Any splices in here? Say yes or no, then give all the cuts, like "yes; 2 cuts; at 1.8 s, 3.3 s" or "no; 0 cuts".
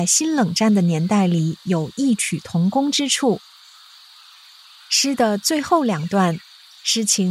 no; 0 cuts